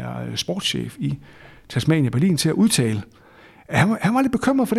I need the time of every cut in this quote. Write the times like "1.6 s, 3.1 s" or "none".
none